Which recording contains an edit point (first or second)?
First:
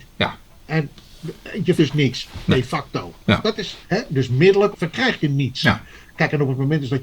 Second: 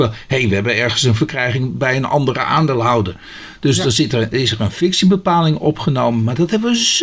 first